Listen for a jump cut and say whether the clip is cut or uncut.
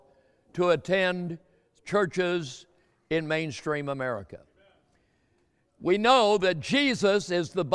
uncut